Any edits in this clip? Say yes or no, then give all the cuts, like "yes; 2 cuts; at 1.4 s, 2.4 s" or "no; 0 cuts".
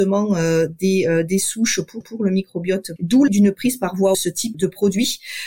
yes; 5 cuts; at 2.0 s, 3.0 s, 3.3 s, 4.1 s, 4.5 s